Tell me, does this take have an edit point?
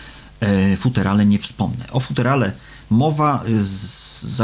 no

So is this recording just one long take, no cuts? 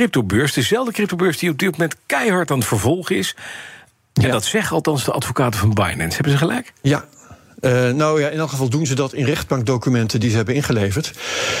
yes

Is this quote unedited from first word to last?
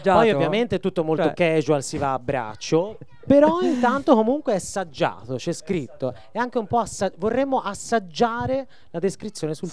yes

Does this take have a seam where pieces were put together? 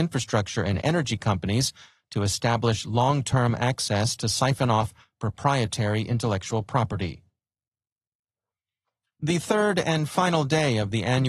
no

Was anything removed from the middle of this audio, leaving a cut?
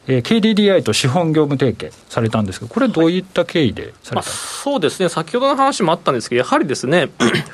yes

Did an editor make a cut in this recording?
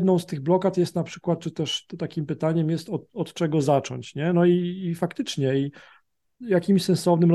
no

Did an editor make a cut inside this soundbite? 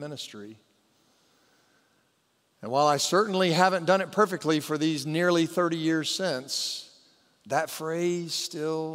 no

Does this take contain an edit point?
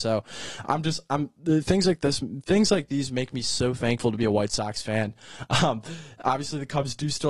no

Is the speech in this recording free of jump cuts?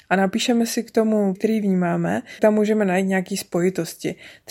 no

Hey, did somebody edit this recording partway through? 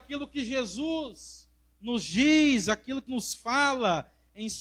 yes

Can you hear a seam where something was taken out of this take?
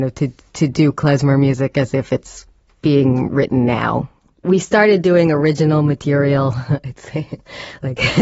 no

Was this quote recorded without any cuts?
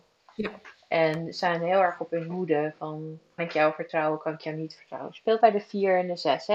no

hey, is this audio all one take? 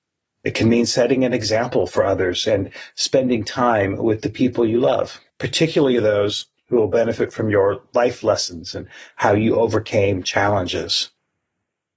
no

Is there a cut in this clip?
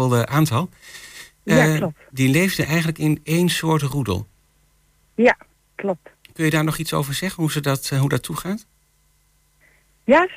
no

